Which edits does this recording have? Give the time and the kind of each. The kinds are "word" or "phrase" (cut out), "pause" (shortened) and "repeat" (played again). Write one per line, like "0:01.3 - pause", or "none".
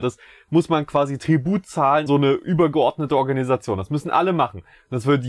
0:02.1 - word